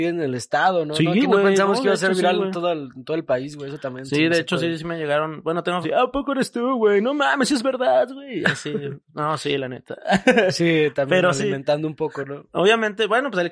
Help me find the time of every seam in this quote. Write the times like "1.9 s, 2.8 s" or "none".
5.8 s